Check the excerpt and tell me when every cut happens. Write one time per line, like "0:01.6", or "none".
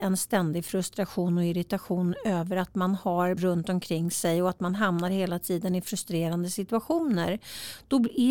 0:03.4